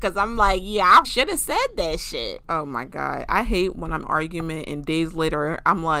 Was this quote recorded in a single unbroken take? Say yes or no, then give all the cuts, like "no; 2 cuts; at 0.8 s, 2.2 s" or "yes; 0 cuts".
no; 2 cuts; at 1.0 s, 4.0 s